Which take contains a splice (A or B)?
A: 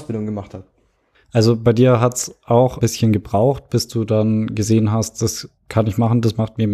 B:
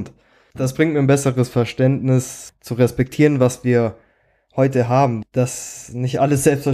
A